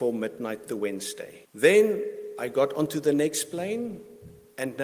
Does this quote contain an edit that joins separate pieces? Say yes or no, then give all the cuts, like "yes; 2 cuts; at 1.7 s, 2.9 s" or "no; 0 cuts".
yes; 1 cut; at 1.4 s